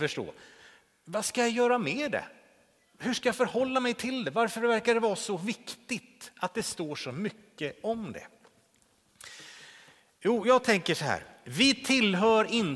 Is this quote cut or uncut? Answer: uncut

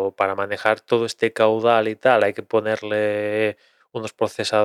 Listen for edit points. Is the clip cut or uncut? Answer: uncut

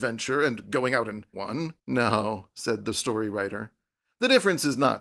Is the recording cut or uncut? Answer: cut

